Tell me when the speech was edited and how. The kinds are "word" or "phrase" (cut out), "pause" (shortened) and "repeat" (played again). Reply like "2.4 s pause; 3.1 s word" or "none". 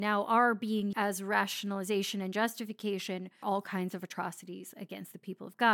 0.9 s word; 3.4 s word